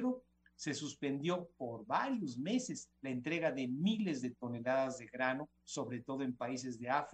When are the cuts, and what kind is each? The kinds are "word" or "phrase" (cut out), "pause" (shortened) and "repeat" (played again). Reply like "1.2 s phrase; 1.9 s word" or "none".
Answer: 3.0 s pause; 5.6 s pause